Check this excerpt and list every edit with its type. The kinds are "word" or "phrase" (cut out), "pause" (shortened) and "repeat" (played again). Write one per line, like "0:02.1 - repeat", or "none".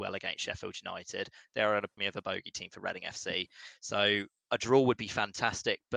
0:02.0 - word